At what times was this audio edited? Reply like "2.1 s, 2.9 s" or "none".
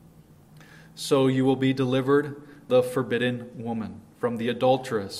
2.7 s, 4.1 s